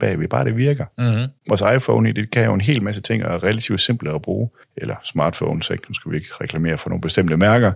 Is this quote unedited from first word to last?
yes; 0 cuts

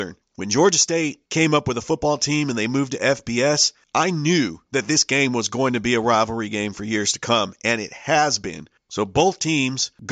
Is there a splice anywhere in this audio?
yes; 1 cut; at 1.2 s

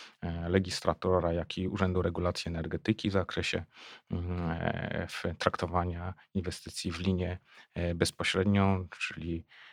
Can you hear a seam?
no; 0 cuts

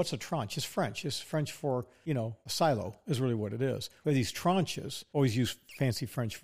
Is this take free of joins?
yes; 0 cuts

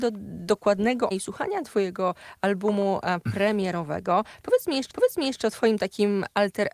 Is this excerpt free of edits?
no; 2 cuts; at 1.1 s, 4.9 s

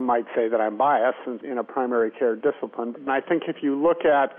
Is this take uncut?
no; 2 cuts; at 1.4 s, 3.1 s

